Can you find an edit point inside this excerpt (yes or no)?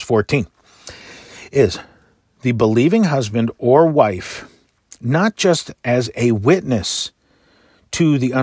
no